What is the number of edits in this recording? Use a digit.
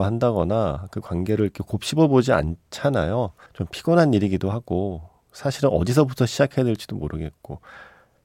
1